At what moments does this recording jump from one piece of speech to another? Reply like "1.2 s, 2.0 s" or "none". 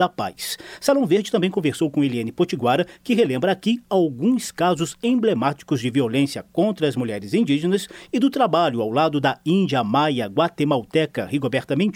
none